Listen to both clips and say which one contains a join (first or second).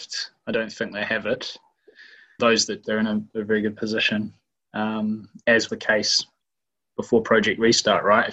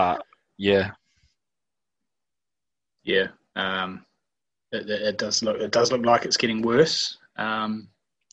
first